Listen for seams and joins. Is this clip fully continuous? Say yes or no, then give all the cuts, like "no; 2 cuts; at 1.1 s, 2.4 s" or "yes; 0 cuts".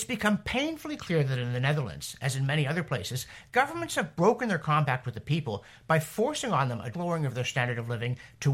no; 1 cut; at 6.9 s